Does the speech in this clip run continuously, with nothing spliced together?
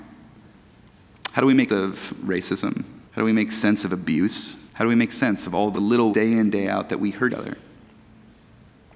no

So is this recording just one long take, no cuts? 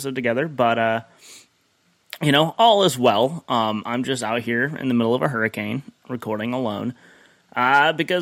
yes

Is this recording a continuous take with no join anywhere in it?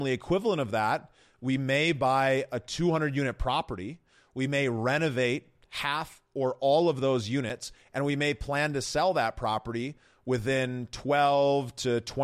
yes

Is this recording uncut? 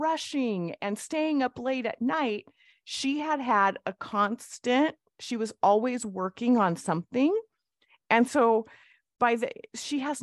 yes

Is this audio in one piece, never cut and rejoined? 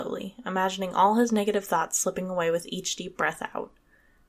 yes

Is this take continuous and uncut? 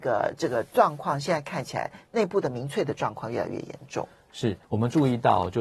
no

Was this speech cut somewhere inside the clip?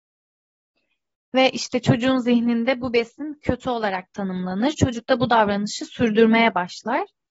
no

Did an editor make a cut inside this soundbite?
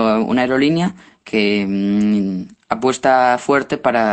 no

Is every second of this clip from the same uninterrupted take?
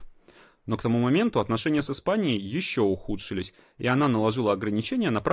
yes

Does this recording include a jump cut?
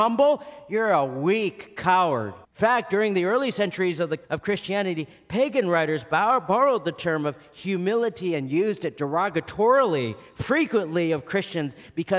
yes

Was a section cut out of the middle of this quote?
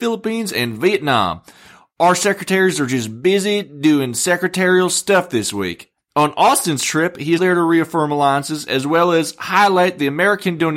yes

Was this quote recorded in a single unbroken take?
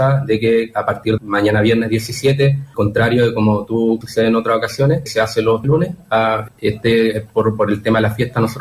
no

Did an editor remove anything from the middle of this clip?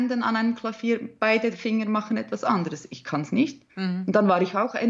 yes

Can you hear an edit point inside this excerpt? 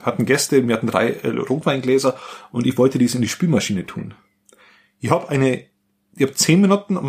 no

